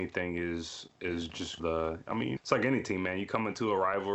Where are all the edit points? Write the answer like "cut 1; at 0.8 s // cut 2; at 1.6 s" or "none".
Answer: cut 1; at 1.6 s // cut 2; at 2.4 s